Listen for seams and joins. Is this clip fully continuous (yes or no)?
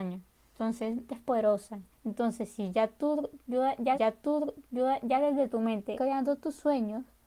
no